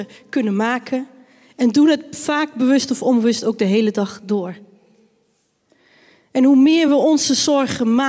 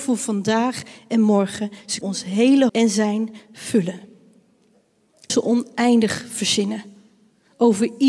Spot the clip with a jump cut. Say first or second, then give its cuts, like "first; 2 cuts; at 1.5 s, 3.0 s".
second; 3 cuts; at 2.0 s, 2.7 s, 5.3 s